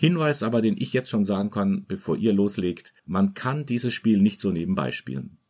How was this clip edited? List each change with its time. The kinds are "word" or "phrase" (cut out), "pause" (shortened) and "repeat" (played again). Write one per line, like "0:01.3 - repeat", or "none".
0:03.0 - pause